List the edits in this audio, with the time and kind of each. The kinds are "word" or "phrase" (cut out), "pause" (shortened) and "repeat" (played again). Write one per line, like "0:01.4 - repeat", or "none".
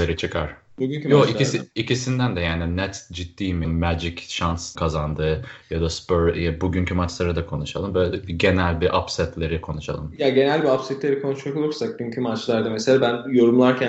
0:03.6 - word
0:04.8 - word